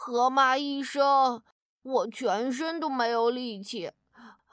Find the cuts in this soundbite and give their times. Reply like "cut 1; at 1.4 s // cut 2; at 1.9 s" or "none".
none

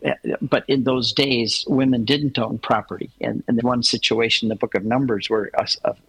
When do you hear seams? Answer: cut 1; at 3.6 s

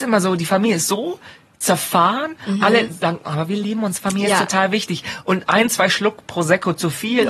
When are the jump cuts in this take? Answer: none

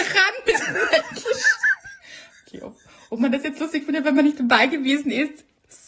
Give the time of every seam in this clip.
none

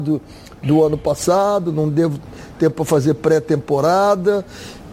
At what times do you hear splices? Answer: none

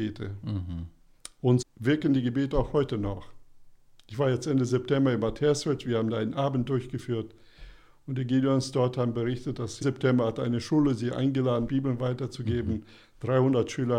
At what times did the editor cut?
cut 1; at 1.6 s // cut 2; at 9.8 s // cut 3; at 11.7 s

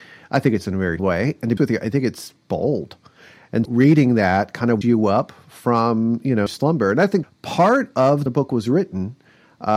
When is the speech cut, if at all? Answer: cut 1; at 1.0 s // cut 2; at 1.6 s // cut 3; at 2.4 s // cut 4; at 3.7 s // cut 5; at 4.8 s // cut 6; at 6.5 s // cut 7; at 7.2 s // cut 8; at 8.3 s

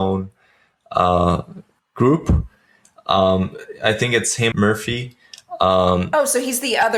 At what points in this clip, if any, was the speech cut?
cut 1; at 1.8 s // cut 2; at 4.5 s

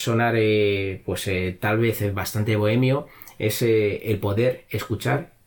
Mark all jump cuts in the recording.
none

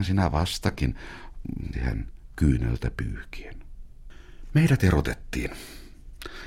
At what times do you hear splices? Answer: cut 1; at 1.7 s

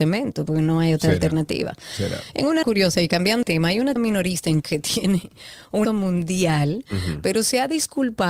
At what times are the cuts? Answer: cut 1; at 2.6 s // cut 2; at 3.4 s // cut 3; at 4.0 s // cut 4; at 4.6 s // cut 5; at 5.8 s

